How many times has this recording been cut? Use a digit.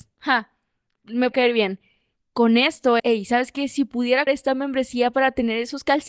3